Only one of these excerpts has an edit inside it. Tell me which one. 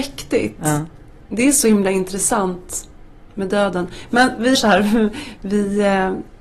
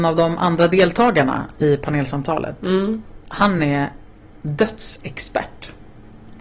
first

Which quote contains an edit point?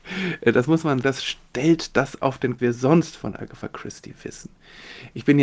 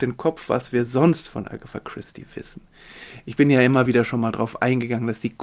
first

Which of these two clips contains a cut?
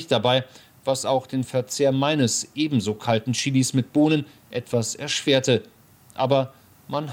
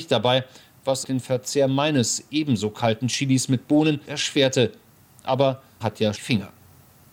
second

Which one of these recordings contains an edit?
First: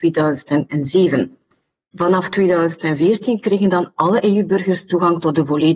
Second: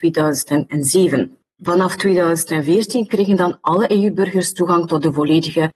second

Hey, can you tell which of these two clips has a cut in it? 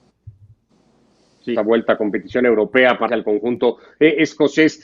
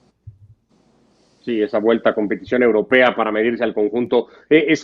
first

